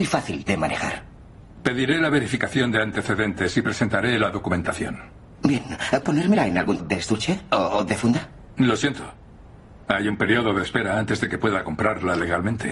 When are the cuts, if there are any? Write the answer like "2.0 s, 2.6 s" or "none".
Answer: 6.0 s, 6.8 s